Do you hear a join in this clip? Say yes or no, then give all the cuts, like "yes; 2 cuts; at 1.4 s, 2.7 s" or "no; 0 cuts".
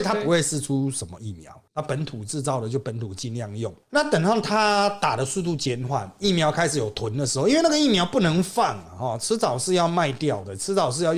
yes; 1 cut; at 3.8 s